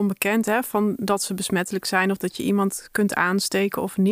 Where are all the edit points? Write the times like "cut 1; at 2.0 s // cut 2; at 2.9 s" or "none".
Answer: none